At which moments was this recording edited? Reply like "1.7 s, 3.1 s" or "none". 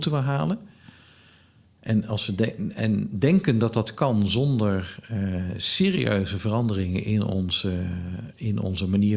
none